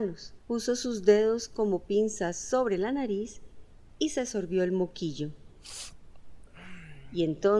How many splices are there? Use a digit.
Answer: 0